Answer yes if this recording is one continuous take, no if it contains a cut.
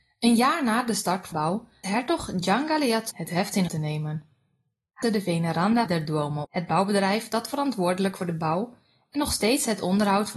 no